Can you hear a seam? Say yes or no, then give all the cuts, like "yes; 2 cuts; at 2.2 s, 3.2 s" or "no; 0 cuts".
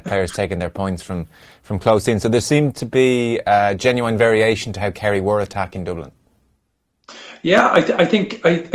no; 0 cuts